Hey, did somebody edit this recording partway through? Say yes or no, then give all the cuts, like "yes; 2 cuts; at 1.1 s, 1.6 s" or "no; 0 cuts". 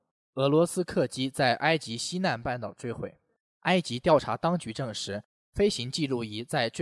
no; 0 cuts